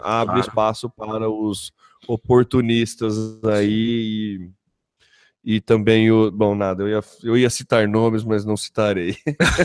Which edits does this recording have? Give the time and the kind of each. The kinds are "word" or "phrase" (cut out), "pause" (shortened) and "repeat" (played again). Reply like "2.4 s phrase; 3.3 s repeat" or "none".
none